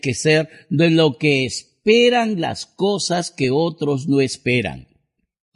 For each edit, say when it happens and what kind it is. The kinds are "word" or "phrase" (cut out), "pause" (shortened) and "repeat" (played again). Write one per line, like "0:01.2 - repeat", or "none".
none